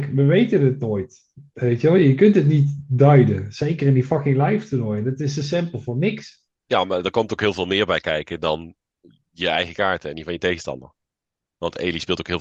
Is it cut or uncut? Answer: uncut